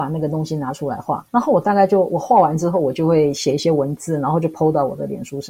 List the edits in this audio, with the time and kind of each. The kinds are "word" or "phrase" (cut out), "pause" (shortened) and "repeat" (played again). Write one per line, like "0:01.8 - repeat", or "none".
0:01.3 - pause

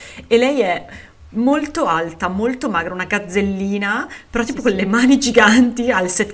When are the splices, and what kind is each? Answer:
none

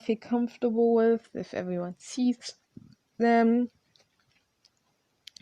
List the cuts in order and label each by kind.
none

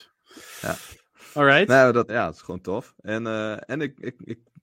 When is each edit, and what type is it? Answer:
0:02.1 - word
0:02.4 - word

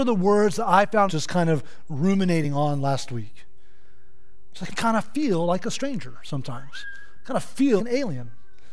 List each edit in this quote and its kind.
0:01.1 - word
0:04.7 - phrase
0:07.8 - word

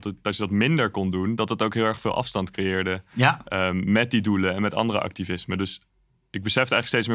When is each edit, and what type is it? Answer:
none

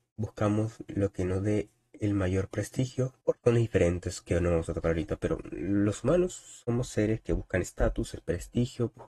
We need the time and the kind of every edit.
0:03.2 - pause

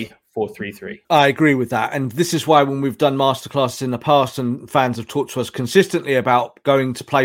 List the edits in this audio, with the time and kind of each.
0:01.0 - pause

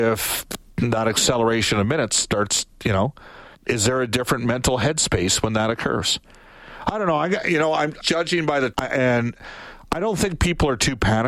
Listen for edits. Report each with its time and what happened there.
0:03.5 - pause
0:08.0 - word
0:08.7 - word

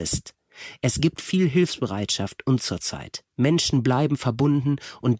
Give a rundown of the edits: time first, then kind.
0:02.6 - word
0:03.3 - pause

